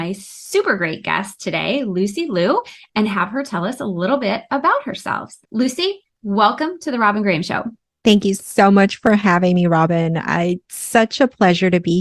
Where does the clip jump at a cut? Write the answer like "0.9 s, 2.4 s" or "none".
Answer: 5.4 s, 7.8 s